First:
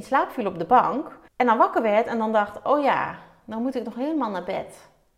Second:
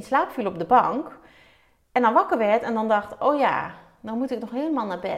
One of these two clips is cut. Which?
first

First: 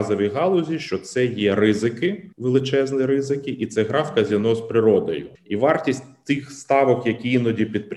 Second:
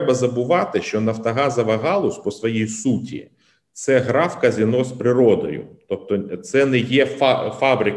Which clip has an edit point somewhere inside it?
first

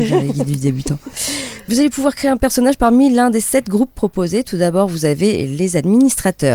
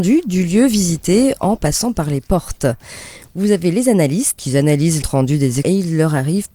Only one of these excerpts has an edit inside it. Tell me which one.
second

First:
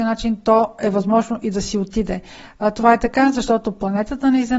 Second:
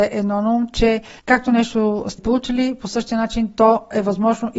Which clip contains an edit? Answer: second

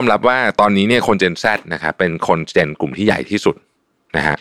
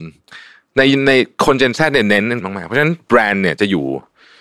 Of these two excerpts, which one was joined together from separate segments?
second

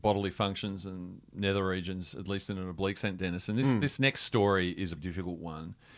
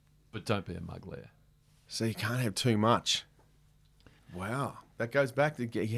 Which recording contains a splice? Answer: first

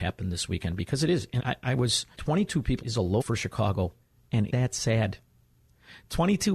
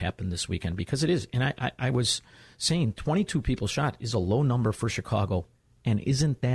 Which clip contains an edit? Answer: first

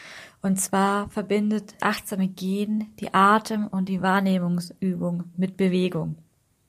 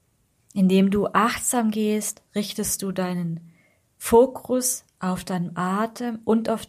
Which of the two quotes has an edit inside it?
first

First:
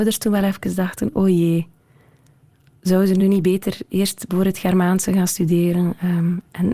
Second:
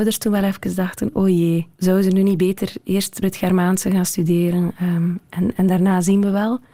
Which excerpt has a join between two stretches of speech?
second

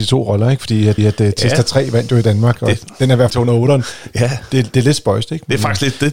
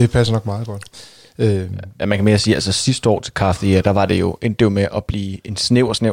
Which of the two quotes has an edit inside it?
first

